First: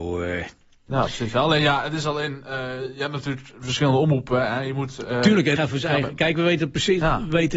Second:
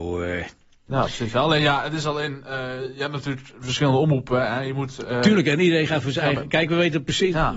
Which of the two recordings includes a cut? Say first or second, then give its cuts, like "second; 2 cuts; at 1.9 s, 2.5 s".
first; 1 cut; at 5.6 s